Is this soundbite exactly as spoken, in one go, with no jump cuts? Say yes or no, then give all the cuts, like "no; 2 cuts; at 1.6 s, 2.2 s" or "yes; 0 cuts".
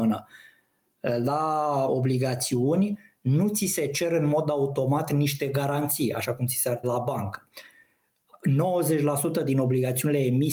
no; 2 cuts; at 1.9 s, 6.8 s